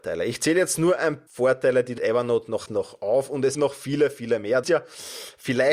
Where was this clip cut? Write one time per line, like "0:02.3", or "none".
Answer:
0:01.3
0:02.0
0:02.7
0:03.5
0:04.6